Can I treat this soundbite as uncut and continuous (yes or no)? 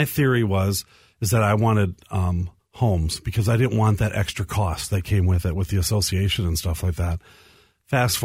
no